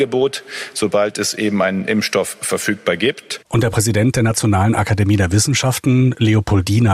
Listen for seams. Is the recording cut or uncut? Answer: uncut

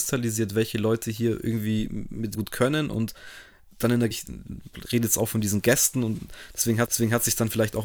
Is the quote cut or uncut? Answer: cut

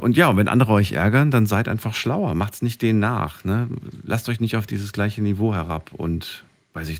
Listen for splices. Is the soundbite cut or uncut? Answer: uncut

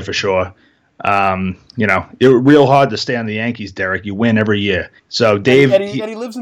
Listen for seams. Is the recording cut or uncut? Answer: cut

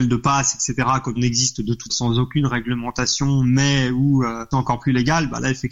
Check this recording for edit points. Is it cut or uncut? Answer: cut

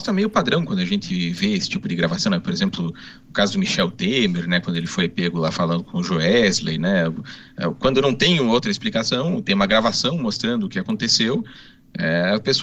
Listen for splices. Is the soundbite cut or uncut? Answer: uncut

